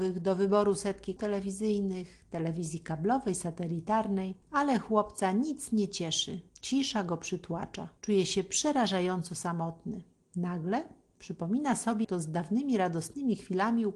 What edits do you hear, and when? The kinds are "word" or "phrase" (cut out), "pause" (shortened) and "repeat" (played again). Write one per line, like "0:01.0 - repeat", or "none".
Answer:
0:01.2 - word
0:04.4 - pause
0:06.5 - pause
0:08.0 - pause
0:10.2 - pause
0:12.0 - word